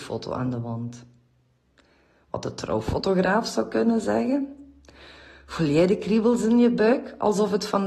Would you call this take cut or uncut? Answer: uncut